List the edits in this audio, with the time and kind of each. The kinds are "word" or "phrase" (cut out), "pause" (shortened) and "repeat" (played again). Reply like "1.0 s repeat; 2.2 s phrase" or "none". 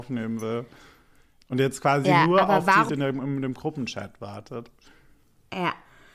2.9 s word